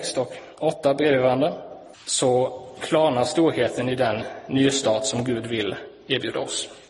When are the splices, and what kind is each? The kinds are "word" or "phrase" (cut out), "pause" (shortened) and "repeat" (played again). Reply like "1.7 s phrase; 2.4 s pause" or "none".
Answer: 1.9 s pause